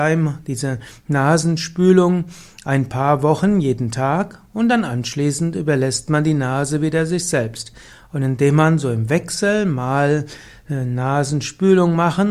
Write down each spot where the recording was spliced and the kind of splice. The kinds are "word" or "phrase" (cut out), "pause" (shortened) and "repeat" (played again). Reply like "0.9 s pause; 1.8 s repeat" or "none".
none